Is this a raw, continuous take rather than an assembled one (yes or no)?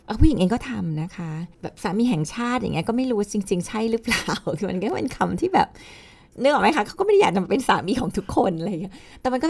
no